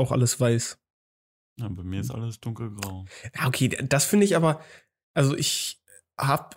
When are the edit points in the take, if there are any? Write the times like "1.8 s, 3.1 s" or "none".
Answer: none